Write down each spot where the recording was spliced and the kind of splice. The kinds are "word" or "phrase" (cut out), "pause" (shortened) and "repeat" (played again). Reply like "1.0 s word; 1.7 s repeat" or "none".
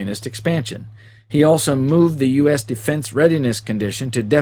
none

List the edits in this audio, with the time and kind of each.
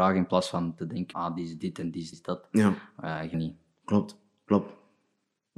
1.1 s word; 2.1 s phrase; 3.3 s phrase

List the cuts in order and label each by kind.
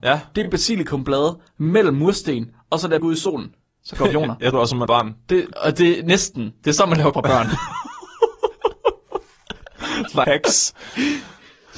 3.0 s word; 4.0 s word; 4.5 s word; 4.9 s word; 5.5 s word; 7.1 s word; 10.2 s word

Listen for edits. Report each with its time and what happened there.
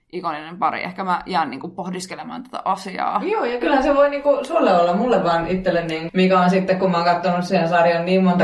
6.1 s word

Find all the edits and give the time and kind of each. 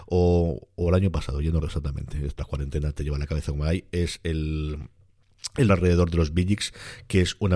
1.6 s word; 2.4 s word; 5.7 s word

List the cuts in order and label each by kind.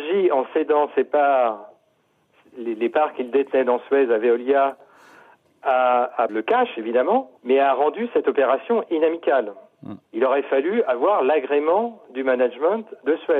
6.3 s phrase; 7.4 s pause; 10.0 s pause

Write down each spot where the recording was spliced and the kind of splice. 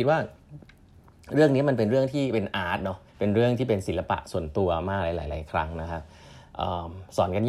3.1 s pause

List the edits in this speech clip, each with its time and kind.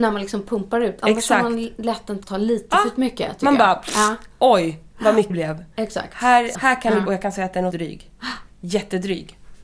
2.2 s word; 5.3 s word; 6.5 s word; 7.1 s phrase; 7.7 s word

